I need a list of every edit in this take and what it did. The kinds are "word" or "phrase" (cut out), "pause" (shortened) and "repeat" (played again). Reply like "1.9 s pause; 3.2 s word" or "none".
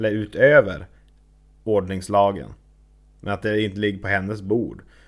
none